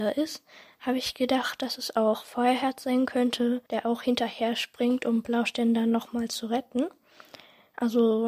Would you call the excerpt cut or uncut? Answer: cut